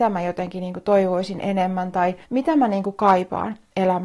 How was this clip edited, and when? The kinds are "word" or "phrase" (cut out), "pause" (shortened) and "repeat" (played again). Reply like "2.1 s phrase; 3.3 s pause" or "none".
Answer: 2.2 s pause